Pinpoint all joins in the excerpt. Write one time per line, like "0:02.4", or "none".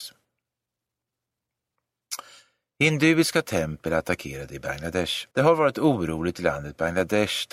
0:05.3